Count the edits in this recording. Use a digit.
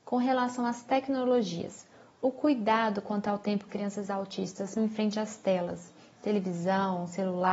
2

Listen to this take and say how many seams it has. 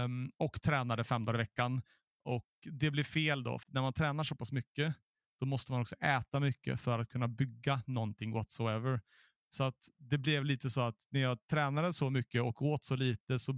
1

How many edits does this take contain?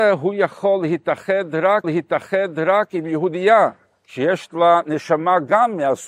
1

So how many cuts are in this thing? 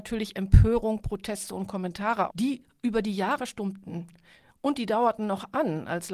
2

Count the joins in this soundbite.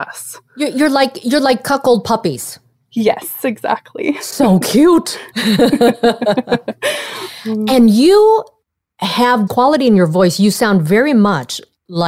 1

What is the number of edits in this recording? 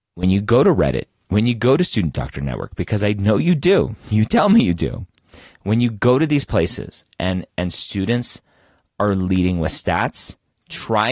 0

